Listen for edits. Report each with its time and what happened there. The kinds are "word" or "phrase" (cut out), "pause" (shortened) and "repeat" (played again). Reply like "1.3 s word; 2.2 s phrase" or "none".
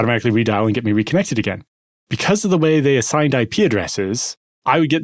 none